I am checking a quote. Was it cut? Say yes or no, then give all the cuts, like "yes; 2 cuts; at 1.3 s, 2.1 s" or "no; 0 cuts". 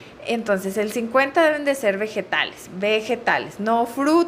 no; 0 cuts